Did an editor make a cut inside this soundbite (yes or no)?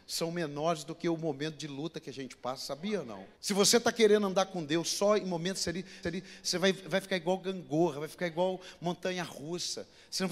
yes